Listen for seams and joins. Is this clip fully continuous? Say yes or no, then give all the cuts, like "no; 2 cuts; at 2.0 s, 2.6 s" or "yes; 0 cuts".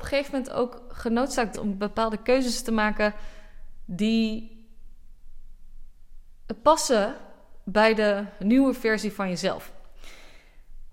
no; 1 cut; at 1.5 s